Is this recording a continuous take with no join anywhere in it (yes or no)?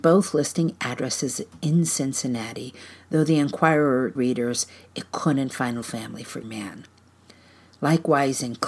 no